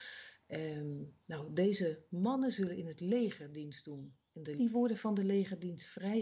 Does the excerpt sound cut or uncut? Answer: cut